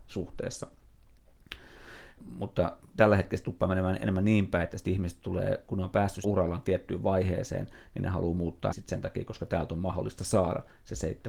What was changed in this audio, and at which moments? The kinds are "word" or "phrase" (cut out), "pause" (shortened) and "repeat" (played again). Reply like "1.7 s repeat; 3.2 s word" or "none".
2.2 s word; 6.2 s word; 8.7 s word